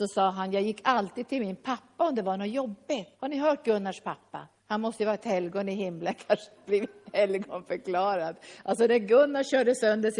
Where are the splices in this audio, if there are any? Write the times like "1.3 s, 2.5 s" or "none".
3.1 s, 4.6 s